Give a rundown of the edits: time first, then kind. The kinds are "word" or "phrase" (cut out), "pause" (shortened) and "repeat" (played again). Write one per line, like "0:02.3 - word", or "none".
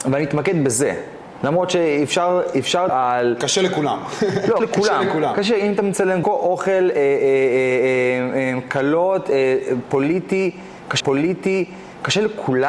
0:02.9 - word
0:04.6 - word
0:06.2 - word
0:11.0 - repeat